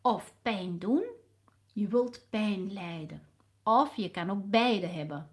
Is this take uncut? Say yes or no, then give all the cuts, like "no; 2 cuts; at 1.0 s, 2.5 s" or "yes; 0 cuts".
no; 1 cut; at 1.6 s